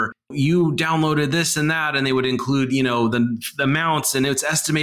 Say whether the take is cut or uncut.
uncut